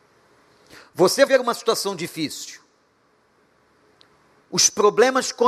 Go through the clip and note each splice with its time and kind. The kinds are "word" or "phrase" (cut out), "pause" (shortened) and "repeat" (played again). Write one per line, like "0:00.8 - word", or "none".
0:01.3 - word